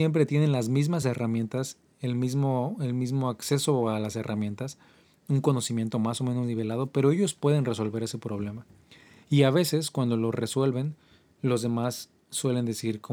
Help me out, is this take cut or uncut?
uncut